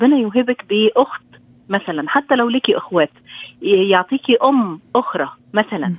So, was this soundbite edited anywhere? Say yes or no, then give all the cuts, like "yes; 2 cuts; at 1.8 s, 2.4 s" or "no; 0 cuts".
no; 0 cuts